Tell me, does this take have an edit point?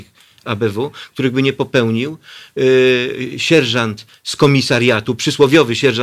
no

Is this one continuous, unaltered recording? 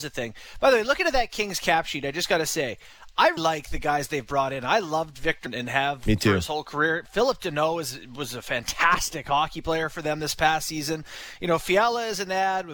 no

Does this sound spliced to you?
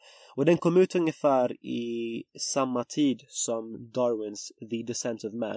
no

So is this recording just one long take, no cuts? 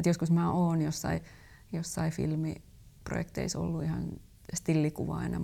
yes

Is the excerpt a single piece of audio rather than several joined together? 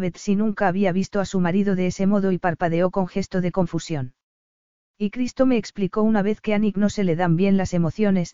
yes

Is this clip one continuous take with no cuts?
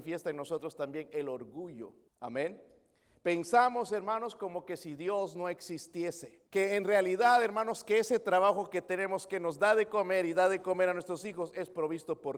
no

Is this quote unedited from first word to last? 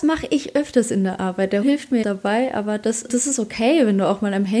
no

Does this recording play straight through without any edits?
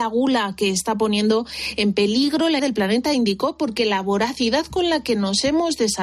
no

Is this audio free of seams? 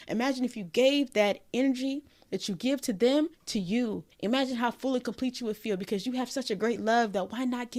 no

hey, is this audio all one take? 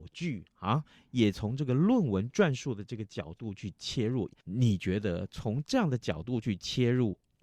yes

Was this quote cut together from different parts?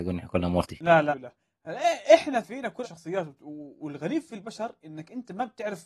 yes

